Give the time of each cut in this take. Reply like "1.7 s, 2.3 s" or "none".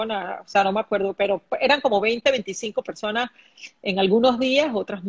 none